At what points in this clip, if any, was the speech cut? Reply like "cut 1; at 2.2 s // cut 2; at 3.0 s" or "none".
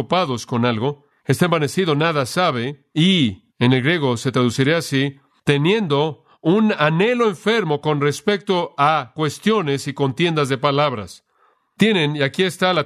cut 1; at 3.5 s